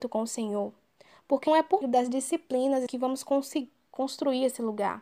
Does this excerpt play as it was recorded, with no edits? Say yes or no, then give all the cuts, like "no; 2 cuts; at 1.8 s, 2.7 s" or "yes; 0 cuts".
no; 3 cuts; at 1.5 s, 1.8 s, 2.9 s